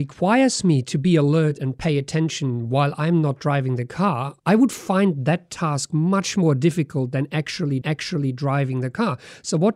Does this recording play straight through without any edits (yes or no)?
no